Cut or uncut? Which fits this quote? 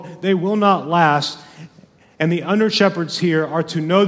uncut